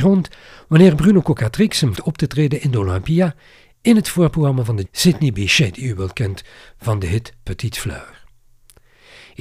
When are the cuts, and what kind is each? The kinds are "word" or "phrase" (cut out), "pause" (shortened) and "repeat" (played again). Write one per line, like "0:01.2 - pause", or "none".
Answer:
0:01.9 - word
0:04.8 - word